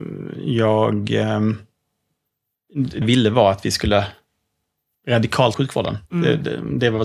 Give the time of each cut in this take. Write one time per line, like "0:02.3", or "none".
0:03.0
0:05.5
0:06.1

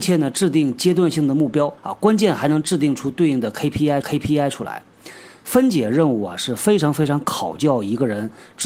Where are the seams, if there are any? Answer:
0:01.8
0:04.0

